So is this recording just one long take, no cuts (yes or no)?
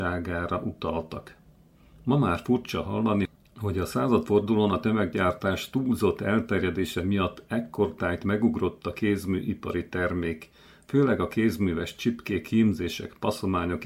yes